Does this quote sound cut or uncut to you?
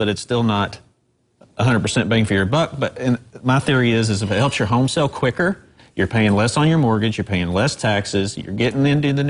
uncut